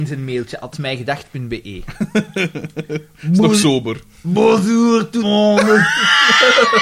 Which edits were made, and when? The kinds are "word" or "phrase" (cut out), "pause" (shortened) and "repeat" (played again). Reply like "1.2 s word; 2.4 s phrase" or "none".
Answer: 5.2 s word